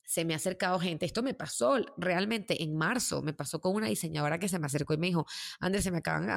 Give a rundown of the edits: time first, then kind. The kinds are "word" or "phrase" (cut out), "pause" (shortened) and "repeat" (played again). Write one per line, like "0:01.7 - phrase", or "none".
none